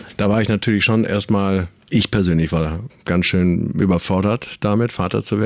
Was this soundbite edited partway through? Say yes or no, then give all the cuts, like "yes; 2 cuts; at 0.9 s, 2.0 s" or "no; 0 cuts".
no; 0 cuts